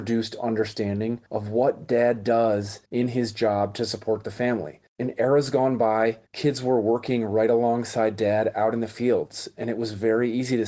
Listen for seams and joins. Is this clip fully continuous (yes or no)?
no